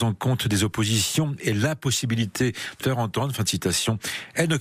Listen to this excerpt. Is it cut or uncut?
cut